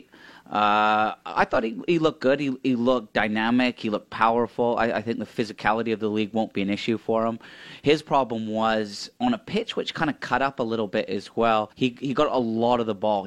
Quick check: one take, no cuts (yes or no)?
no